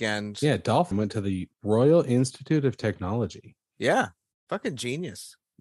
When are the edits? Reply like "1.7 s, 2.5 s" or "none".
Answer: 0.9 s, 1.5 s